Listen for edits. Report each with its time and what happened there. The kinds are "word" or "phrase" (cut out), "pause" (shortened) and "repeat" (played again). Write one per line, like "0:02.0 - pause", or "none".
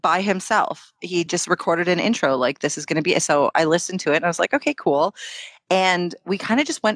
none